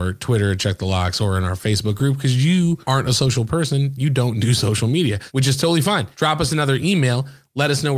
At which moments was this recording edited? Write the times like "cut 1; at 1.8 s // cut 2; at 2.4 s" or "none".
none